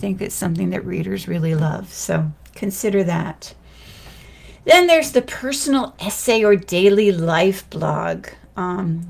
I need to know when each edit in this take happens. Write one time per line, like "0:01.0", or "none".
none